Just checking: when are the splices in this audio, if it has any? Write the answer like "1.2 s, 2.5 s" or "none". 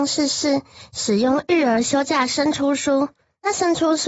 none